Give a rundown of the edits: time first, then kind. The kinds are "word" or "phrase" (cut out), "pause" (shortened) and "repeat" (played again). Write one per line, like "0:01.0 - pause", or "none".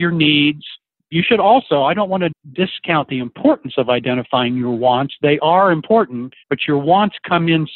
0:06.4 - pause